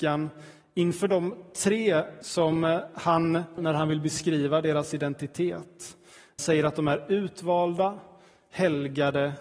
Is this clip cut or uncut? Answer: cut